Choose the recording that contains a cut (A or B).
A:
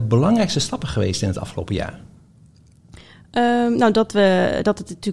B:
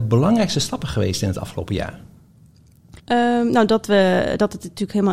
B